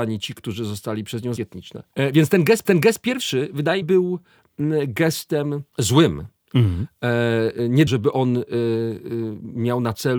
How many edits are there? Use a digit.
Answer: 5